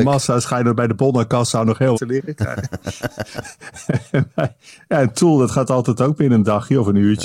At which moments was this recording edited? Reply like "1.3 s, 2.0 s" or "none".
1.9 s